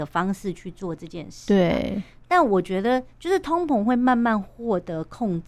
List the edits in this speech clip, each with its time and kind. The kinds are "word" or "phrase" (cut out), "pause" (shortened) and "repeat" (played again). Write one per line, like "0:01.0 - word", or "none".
0:03.1 - pause